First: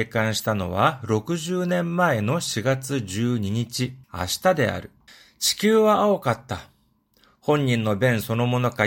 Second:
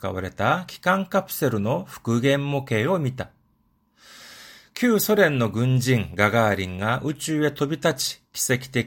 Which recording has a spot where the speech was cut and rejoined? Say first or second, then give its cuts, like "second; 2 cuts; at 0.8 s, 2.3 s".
first; 2 cuts; at 4.0 s, 5.1 s